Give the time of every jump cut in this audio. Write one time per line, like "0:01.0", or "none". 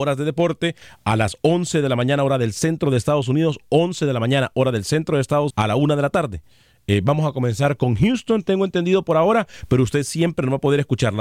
0:05.5

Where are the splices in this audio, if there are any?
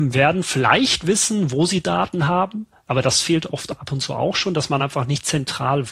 none

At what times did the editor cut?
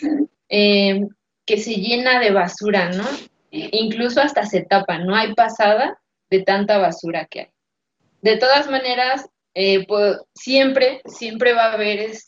none

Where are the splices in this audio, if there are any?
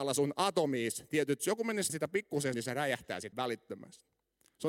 0:01.4
0:01.9
0:02.5
0:03.3

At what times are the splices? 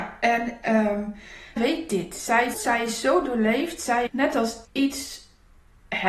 0:01.6
0:02.5
0:04.1
0:04.6

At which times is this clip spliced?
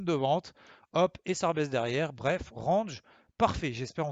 none

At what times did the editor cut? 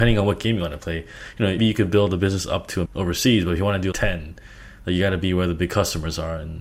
0:01.6
0:02.9
0:03.9

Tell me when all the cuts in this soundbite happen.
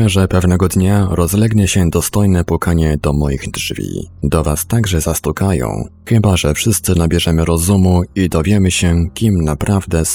none

